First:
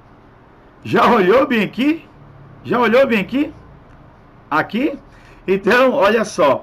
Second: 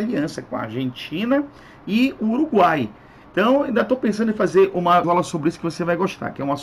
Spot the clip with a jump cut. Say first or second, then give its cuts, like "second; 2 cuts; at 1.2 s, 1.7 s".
second; 1 cut; at 5.0 s